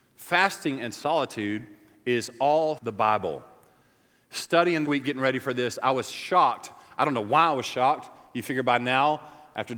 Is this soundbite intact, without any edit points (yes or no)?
no